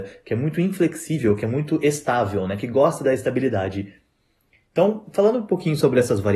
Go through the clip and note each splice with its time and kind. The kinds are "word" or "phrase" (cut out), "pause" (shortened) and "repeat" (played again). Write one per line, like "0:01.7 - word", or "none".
none